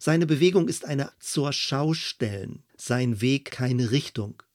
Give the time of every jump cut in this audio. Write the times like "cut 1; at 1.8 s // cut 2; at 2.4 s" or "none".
cut 1; at 1.1 s // cut 2; at 2.7 s // cut 3; at 3.5 s